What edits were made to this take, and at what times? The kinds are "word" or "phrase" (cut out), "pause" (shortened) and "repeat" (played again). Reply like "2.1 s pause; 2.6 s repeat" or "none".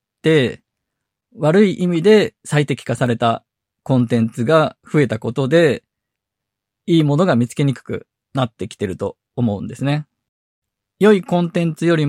2.4 s pause; 4.8 s pause